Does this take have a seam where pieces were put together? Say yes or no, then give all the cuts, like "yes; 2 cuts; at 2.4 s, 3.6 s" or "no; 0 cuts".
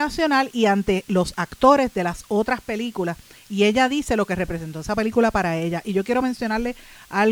no; 0 cuts